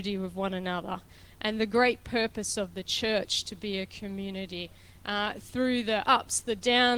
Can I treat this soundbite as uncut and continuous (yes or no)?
yes